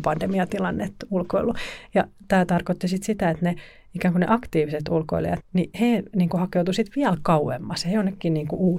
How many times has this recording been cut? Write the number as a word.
two